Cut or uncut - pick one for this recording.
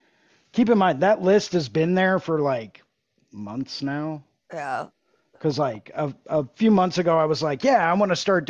uncut